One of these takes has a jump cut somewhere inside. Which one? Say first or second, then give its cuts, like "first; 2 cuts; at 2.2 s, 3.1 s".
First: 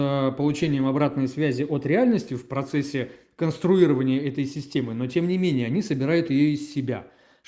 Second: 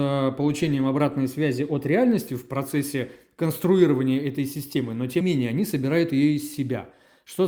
second; 1 cut; at 5.2 s